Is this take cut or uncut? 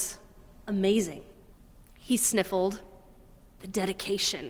cut